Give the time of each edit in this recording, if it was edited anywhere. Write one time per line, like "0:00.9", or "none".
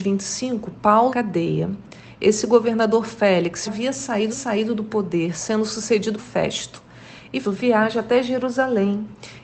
0:01.1
0:03.7
0:04.3
0:06.2
0:07.4